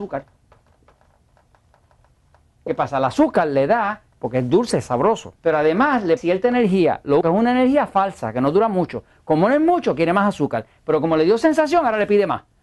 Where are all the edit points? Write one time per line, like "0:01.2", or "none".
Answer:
0:04.1
0:05.4
0:06.2
0:07.2